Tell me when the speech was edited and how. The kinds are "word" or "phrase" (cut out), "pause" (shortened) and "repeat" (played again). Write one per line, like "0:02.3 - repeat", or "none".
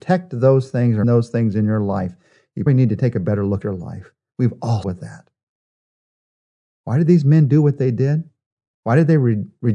0:01.0 - word
0:02.7 - word
0:03.6 - word
0:04.8 - word